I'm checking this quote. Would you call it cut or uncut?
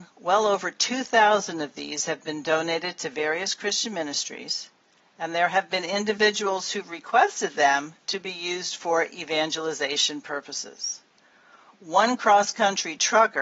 uncut